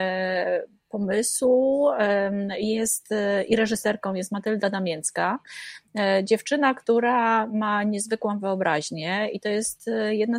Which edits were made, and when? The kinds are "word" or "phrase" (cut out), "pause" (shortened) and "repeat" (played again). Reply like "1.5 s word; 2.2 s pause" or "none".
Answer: none